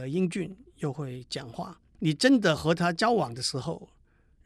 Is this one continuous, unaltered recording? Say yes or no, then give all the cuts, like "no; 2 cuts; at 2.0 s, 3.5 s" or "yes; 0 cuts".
no; 1 cut; at 1.9 s